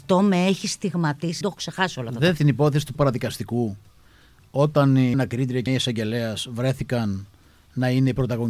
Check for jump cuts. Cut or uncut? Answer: cut